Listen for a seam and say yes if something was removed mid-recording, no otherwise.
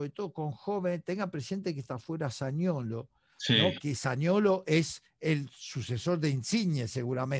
no